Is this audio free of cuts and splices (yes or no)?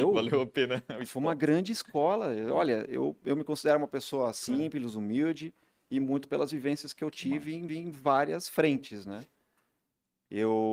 no